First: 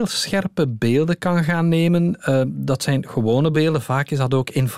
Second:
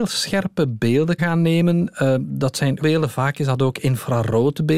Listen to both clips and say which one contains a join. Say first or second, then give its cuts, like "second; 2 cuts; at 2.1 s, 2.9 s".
second; 2 cuts; at 1.2 s, 2.8 s